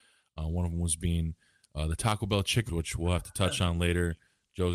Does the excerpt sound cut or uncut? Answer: cut